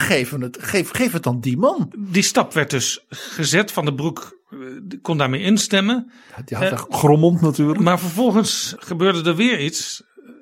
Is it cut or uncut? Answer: cut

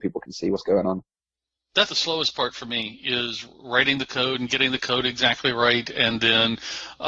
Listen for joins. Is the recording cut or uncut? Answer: cut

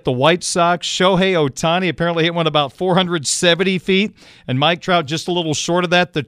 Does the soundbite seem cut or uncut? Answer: uncut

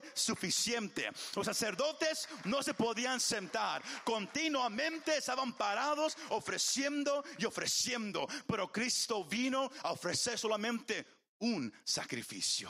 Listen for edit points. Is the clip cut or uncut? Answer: uncut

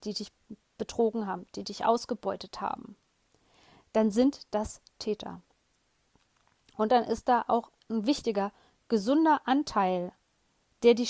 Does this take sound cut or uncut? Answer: uncut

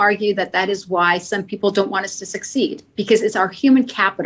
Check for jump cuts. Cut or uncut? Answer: cut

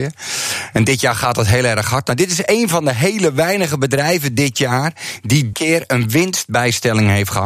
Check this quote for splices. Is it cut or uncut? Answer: cut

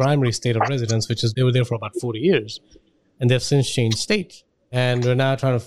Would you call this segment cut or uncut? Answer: uncut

